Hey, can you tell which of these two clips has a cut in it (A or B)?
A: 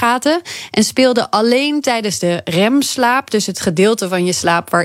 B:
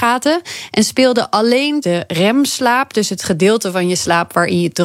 B